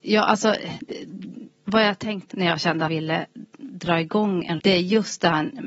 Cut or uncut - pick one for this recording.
cut